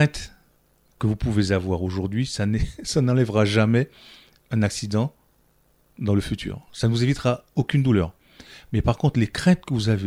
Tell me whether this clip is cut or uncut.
uncut